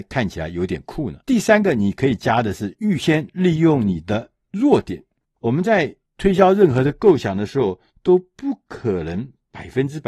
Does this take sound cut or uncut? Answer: cut